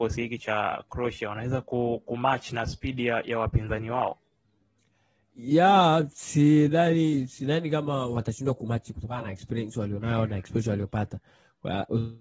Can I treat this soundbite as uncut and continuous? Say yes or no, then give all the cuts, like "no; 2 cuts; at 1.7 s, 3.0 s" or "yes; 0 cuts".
yes; 0 cuts